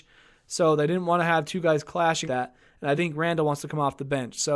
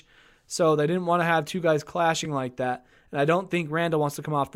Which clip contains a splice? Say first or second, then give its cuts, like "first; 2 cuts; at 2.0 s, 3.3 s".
first; 2 cuts; at 2.2 s, 2.9 s